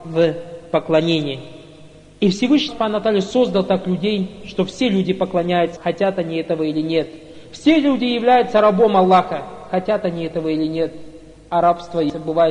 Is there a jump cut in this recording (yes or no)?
yes